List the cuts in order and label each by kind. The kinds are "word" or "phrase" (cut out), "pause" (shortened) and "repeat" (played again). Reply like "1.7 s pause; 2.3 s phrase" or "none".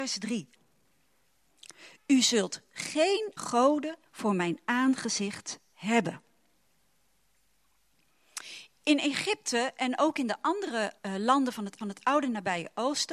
3.4 s word; 4.1 s pause; 11.0 s pause; 11.8 s repeat